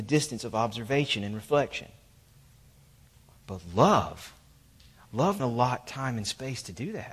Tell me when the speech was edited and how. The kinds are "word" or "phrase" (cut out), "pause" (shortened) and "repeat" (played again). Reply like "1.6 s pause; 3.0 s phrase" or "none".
5.4 s word